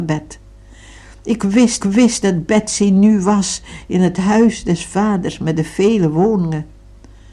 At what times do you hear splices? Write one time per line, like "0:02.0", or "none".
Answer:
0:01.8